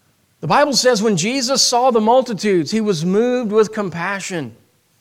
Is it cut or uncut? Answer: uncut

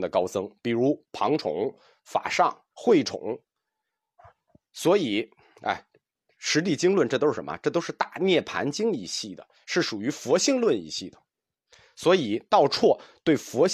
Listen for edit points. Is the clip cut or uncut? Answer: cut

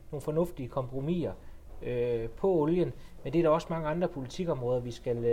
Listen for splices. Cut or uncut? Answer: uncut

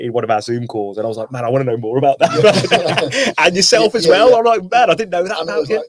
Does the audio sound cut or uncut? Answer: uncut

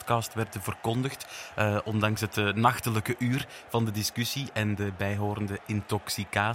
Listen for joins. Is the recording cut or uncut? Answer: uncut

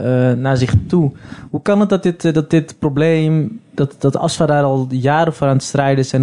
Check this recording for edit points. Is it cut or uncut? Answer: uncut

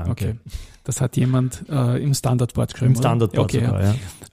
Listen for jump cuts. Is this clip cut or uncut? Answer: uncut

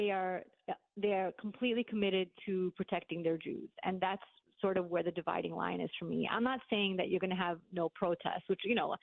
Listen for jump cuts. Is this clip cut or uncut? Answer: uncut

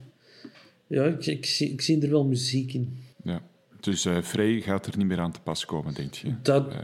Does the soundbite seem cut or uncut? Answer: cut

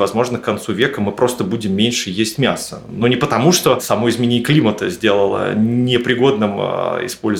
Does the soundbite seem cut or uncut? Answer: uncut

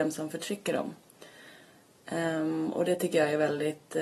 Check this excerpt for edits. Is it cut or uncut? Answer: uncut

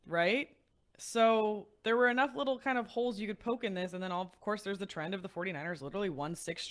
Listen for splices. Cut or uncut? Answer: uncut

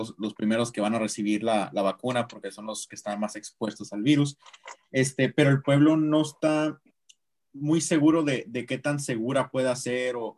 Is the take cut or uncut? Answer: uncut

